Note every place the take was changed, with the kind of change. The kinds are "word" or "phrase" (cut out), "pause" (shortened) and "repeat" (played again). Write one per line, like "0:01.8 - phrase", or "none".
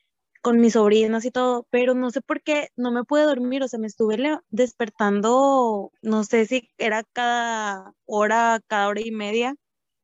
0:06.0 - pause